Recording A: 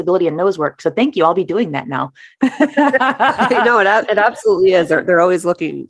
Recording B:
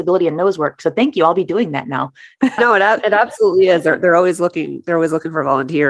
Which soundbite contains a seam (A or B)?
B